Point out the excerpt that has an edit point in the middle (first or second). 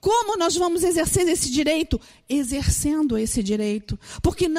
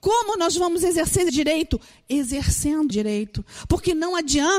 second